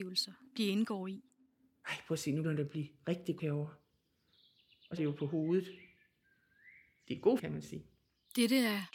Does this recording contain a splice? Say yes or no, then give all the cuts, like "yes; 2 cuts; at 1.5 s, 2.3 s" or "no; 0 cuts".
yes; 4 cuts; at 2.4 s, 3.4 s, 5.0 s, 7.4 s